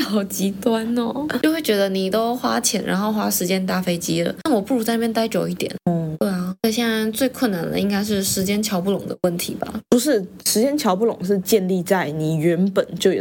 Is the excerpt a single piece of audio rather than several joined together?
yes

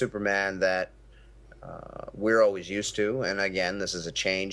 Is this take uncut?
yes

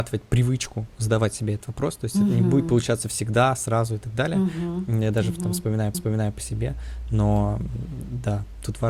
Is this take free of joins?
no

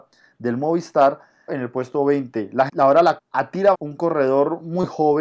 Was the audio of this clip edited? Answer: yes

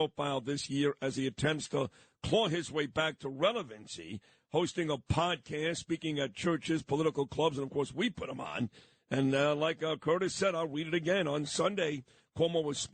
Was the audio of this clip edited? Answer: no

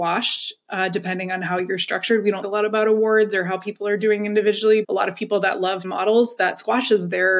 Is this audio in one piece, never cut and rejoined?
no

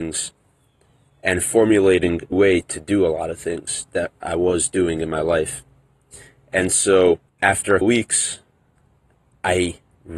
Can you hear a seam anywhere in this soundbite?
yes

